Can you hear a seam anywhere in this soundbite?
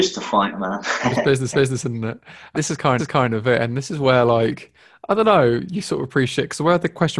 yes; 3 cuts; at 1.5 s, 2.5 s, 3.0 s

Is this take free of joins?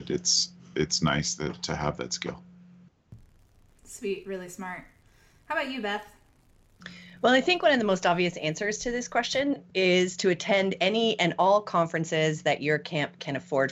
yes; 0 cuts

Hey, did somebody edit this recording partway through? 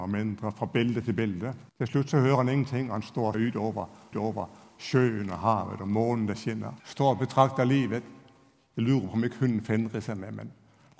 yes; 4 cuts; at 1.7 s, 3.3 s, 4.1 s, 6.8 s

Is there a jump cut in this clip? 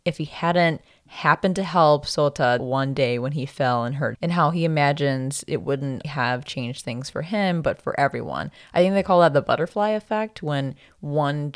yes; 3 cuts; at 2.6 s, 4.1 s, 6.0 s

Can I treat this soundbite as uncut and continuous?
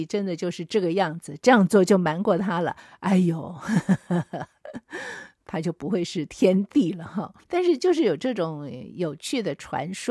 no; 1 cut; at 7.4 s

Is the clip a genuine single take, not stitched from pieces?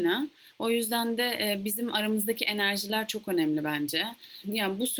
yes; 0 cuts

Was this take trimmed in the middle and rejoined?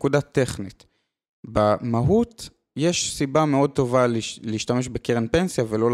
no; 0 cuts

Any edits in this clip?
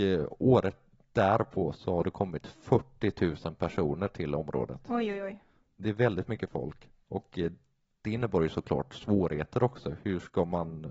no; 0 cuts

